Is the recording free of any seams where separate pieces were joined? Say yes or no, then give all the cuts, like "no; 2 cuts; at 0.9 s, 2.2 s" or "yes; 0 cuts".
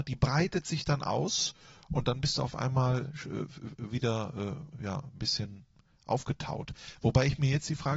yes; 0 cuts